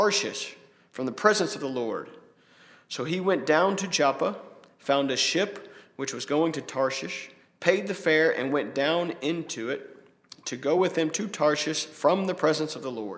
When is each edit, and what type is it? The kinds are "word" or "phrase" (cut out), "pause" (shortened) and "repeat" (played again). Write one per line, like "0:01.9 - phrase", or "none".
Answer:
none